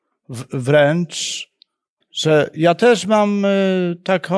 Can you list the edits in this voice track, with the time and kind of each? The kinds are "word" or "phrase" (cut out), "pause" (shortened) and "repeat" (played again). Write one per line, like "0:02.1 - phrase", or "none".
0:02.0 - phrase